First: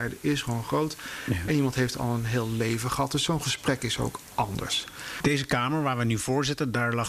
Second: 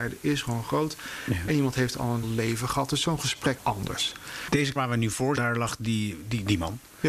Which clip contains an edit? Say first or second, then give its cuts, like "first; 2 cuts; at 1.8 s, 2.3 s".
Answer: second; 4 cuts; at 2.2 s, 3.6 s, 4.8 s, 5.4 s